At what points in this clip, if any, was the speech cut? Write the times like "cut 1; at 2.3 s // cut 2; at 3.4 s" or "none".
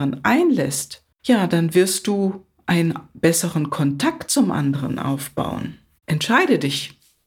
cut 1; at 1.1 s